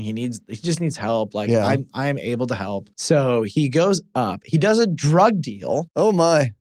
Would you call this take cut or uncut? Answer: cut